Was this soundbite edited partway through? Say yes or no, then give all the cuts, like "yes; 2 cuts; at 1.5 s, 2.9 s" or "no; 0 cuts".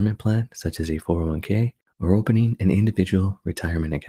no; 0 cuts